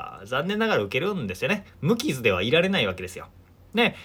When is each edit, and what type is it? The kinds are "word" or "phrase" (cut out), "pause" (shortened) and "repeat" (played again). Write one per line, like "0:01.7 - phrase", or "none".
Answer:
0:01.7 - pause